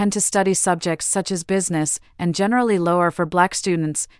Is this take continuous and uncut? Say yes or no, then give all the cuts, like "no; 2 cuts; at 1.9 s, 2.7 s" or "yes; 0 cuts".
yes; 0 cuts